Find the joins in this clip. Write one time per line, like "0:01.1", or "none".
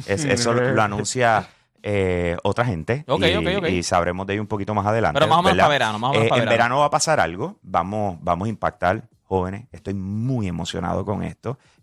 none